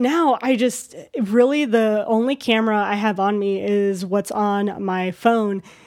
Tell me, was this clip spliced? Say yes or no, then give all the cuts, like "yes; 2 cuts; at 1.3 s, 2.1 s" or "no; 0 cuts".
no; 0 cuts